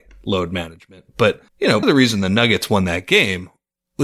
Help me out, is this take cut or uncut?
cut